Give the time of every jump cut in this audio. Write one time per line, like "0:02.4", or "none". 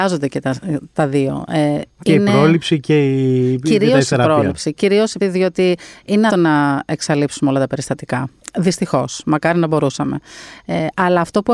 0:05.2
0:06.3